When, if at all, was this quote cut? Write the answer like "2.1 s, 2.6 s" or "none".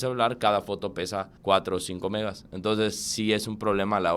1.4 s